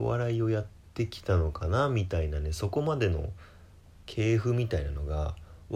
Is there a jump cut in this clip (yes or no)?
no